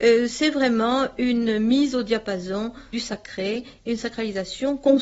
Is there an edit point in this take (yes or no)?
yes